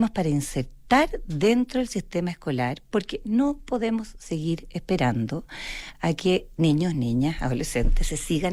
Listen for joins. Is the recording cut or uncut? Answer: uncut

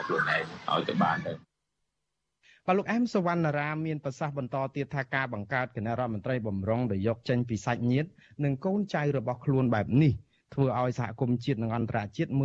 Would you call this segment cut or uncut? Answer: uncut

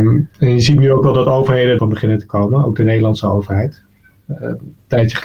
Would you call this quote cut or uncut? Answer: cut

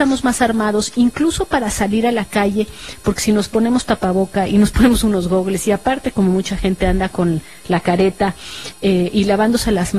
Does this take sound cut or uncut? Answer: uncut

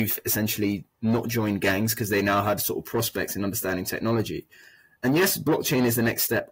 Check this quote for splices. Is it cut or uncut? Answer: cut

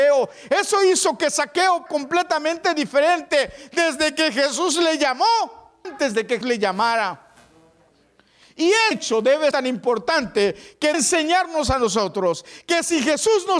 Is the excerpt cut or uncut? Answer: cut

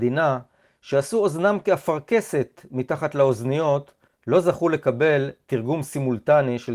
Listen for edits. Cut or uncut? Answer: uncut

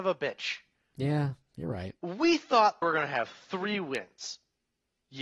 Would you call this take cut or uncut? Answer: cut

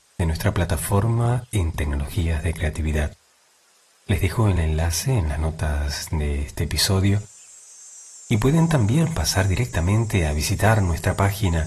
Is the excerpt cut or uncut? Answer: uncut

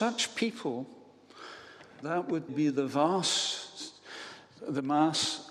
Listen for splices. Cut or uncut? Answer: cut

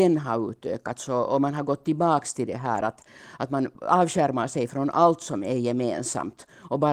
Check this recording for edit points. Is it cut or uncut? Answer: uncut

